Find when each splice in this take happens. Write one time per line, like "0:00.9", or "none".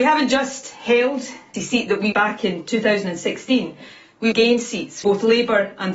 0:01.5
0:02.1
0:04.3
0:05.0